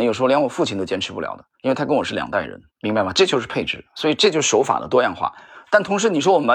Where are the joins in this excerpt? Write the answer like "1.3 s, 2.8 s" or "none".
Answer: 1.5 s, 2.7 s